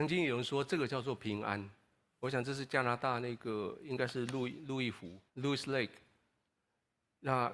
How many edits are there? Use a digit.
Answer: 1